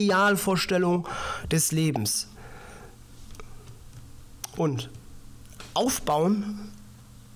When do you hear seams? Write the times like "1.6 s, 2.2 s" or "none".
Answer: none